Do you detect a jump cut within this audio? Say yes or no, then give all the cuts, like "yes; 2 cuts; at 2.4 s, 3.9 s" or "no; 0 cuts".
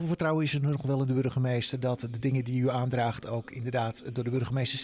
no; 0 cuts